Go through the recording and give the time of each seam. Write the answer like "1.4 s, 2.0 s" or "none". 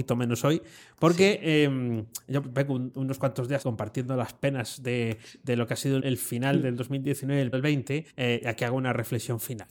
3.6 s, 6.0 s, 7.5 s, 8.1 s

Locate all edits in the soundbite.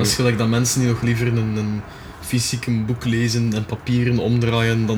none

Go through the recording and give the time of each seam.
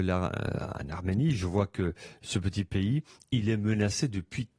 none

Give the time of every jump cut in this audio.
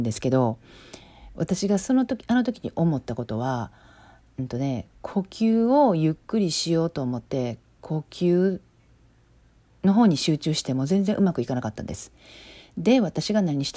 4.9 s, 7.3 s

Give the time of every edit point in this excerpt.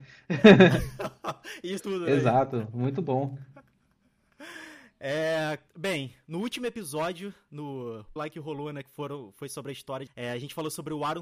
1.8 s, 5.7 s, 8.2 s, 10.1 s

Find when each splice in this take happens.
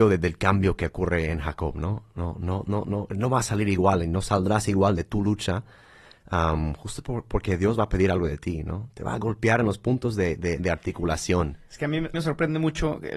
12.1 s

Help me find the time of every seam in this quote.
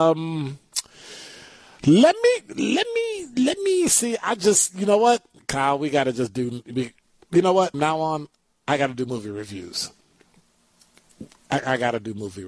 7.7 s

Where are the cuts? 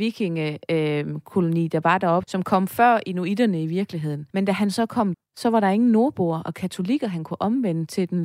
2.2 s, 4.3 s, 5.1 s

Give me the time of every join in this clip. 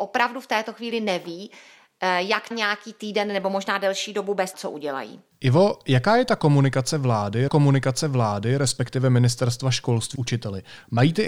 2.5 s, 4.5 s, 5.3 s, 7.5 s, 10.1 s

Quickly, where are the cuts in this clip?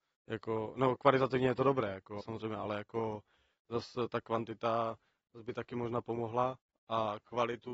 2.2 s

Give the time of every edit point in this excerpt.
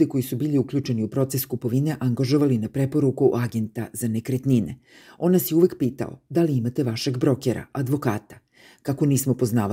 none

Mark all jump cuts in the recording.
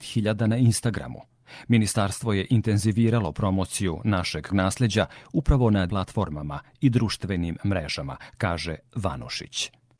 4.5 s, 5.9 s

